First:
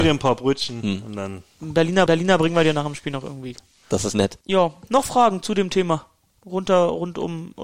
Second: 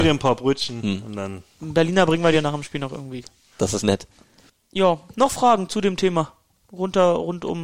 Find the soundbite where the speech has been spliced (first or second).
first